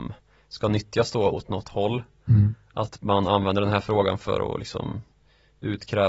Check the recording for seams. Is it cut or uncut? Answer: uncut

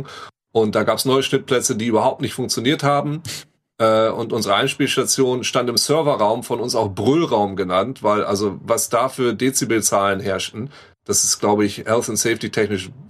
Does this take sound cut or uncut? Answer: uncut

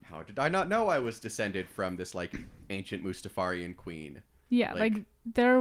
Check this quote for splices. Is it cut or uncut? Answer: uncut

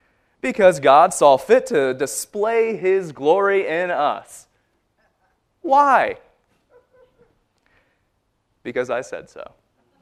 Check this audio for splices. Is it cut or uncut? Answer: uncut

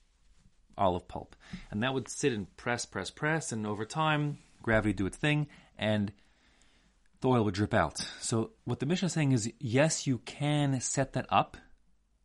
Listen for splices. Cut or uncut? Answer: cut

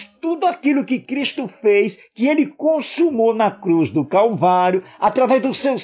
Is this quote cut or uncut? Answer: uncut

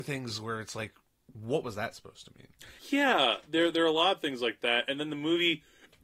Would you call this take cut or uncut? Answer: cut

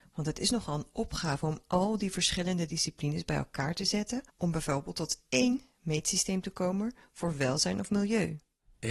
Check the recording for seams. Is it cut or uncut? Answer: cut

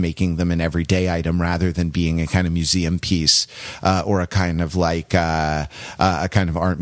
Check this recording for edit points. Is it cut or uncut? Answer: uncut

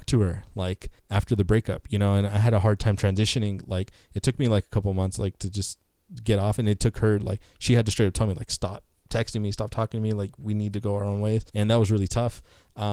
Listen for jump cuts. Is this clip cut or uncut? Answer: cut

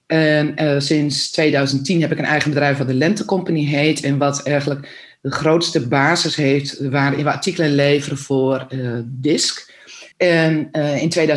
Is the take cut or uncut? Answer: cut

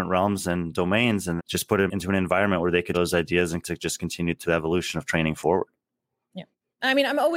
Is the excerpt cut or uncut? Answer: cut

